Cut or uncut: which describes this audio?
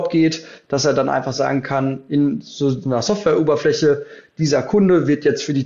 uncut